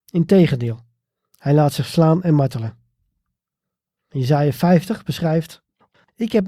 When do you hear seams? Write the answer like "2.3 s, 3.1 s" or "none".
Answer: none